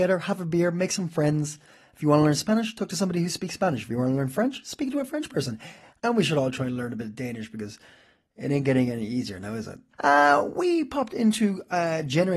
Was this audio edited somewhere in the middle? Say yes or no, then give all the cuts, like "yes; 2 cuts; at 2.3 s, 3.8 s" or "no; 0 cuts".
no; 0 cuts